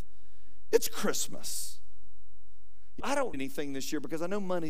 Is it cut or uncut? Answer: cut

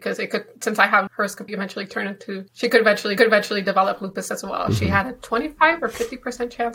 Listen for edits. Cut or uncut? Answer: cut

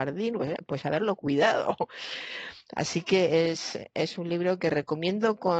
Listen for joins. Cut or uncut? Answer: uncut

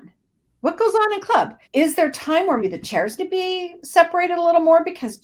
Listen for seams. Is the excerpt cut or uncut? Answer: cut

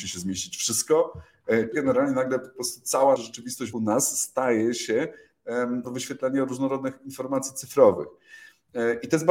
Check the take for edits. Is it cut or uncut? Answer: cut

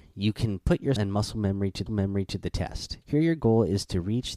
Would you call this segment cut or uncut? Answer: cut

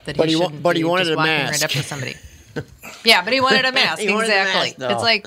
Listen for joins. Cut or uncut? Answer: uncut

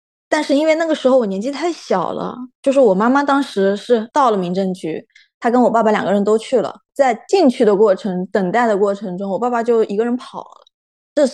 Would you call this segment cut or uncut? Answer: uncut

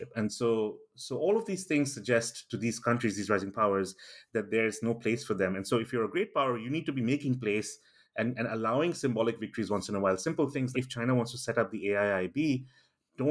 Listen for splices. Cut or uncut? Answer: cut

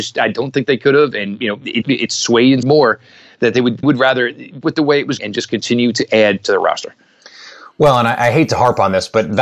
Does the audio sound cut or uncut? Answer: cut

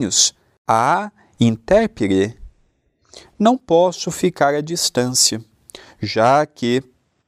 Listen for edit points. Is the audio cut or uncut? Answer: uncut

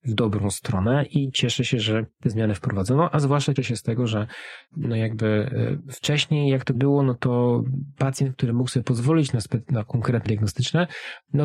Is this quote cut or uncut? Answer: cut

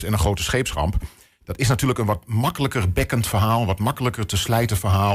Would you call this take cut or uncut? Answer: uncut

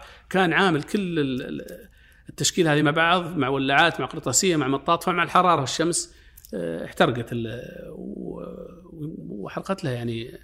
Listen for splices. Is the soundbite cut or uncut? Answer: uncut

